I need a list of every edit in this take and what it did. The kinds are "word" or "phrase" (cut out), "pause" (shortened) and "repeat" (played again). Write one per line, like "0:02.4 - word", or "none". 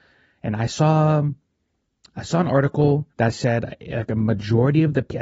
0:03.1 - pause